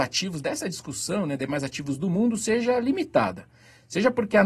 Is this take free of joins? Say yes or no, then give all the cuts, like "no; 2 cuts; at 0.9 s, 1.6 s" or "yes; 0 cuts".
yes; 0 cuts